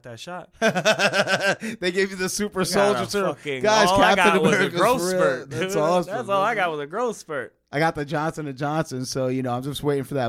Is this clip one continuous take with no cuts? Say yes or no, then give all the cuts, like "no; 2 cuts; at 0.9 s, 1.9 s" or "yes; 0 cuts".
yes; 0 cuts